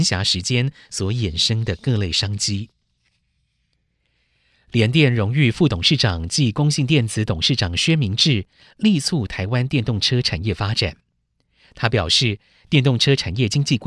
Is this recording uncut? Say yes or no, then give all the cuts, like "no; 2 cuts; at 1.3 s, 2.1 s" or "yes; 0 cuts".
yes; 0 cuts